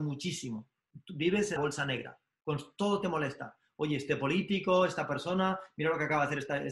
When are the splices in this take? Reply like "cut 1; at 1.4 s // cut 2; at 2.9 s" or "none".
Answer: cut 1; at 1.6 s